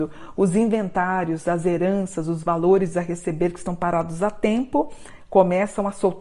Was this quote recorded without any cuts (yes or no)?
yes